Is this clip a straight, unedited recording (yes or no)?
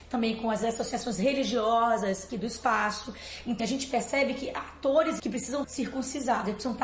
no